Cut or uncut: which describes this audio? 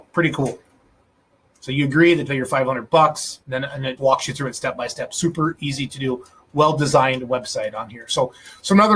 cut